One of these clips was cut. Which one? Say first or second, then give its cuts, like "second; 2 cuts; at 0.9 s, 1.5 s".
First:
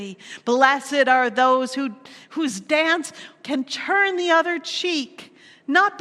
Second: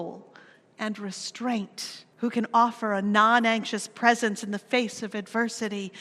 second; 1 cut; at 2.1 s